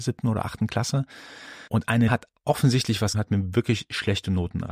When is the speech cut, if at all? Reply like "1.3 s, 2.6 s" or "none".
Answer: 1.7 s, 2.1 s, 3.1 s